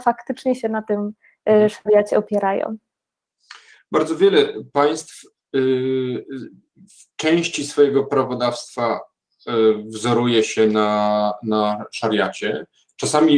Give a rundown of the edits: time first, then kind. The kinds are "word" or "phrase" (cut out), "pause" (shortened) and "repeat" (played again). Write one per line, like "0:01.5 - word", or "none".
none